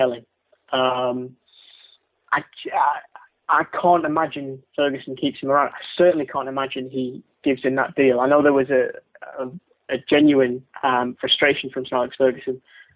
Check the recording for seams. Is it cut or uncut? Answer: uncut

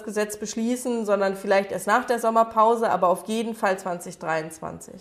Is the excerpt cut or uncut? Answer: uncut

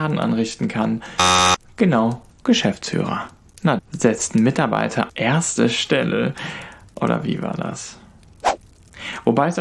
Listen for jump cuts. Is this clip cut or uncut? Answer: cut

